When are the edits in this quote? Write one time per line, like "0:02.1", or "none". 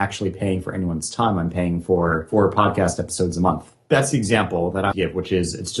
0:04.9

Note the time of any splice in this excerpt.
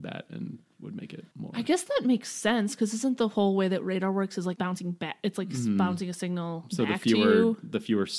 0:01.3
0:04.6

